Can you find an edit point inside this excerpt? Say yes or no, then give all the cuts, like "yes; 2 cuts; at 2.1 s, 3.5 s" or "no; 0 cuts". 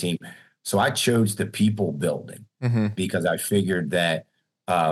no; 0 cuts